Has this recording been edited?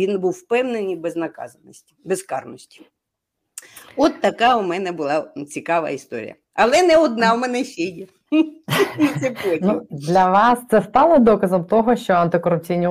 no; 0 cuts

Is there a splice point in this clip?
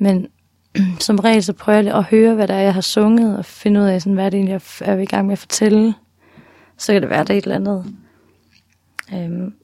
no; 0 cuts

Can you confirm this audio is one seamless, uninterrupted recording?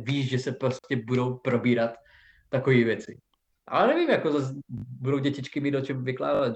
yes; 0 cuts

